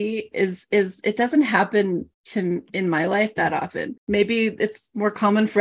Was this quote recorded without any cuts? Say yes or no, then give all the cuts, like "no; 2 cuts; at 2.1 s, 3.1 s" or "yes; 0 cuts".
no; 1 cut; at 2.1 s